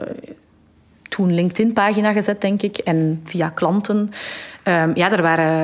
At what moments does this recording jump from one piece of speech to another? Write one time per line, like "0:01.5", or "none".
none